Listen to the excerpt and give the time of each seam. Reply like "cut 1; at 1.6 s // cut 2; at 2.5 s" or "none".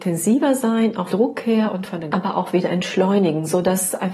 cut 1; at 1.1 s // cut 2; at 2.1 s